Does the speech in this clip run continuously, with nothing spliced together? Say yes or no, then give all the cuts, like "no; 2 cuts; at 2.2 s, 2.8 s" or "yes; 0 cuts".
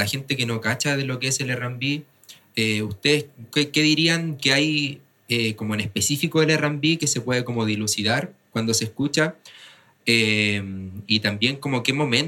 yes; 0 cuts